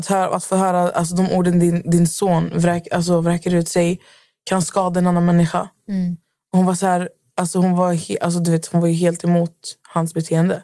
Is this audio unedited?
yes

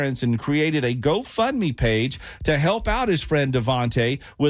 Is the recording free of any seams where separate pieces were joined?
yes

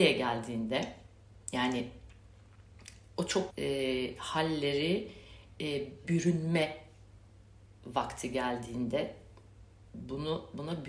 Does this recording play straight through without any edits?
no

